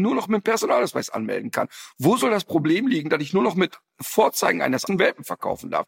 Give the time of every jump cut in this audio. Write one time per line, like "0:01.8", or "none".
0:04.9